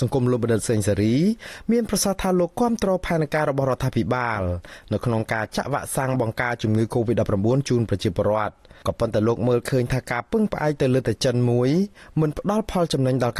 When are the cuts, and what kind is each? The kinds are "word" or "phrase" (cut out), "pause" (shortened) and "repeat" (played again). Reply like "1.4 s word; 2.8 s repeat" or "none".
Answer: none

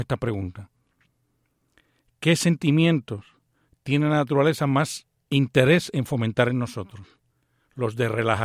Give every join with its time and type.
none

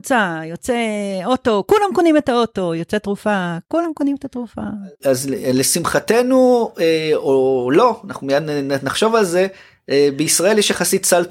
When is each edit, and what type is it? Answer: none

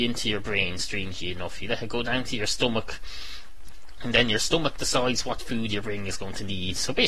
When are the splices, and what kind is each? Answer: none

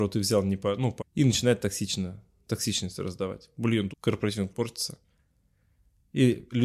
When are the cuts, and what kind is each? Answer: 1.0 s word; 3.9 s word; 4.5 s word

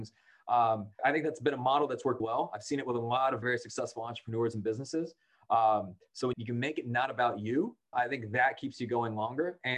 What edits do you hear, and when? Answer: 1.0 s word; 2.2 s word; 3.4 s word; 6.3 s word; 7.9 s word

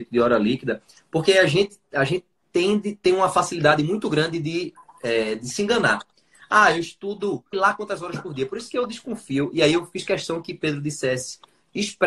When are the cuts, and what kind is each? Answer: 7.5 s word

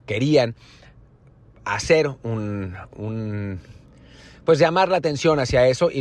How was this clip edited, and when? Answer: none

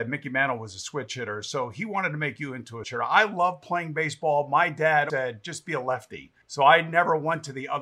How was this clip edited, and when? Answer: 2.8 s word; 5.1 s word; 6.4 s pause

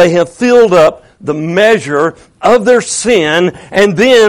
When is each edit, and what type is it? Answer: none

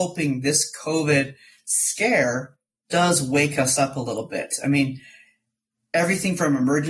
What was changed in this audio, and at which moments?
none

